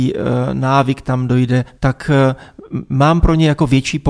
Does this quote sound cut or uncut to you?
cut